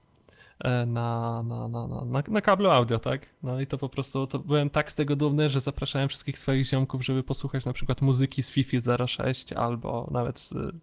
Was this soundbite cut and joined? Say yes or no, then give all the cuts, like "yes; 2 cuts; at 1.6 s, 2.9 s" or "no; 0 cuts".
no; 0 cuts